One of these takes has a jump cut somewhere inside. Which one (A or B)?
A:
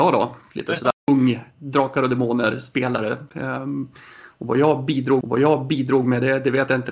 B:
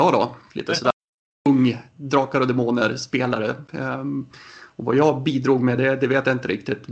A